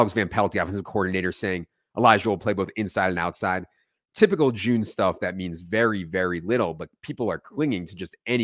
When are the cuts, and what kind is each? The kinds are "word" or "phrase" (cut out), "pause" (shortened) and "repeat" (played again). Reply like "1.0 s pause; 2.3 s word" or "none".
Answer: none